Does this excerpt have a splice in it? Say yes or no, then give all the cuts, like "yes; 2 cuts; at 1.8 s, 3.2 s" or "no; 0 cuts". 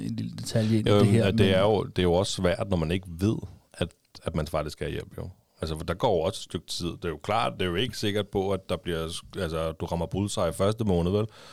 no; 0 cuts